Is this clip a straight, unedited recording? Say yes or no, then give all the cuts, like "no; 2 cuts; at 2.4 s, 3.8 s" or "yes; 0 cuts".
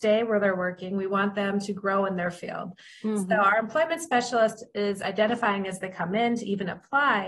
yes; 0 cuts